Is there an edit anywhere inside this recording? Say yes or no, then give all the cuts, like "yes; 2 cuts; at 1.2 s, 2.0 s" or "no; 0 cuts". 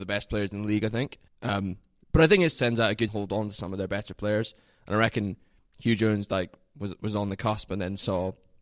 yes; 3 cuts; at 1.3 s, 2.5 s, 3.1 s